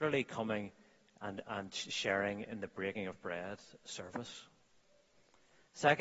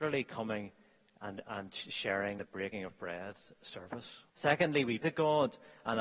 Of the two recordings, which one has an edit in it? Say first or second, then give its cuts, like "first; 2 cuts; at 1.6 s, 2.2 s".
second; 3 cuts; at 2.4 s, 4.3 s, 5.0 s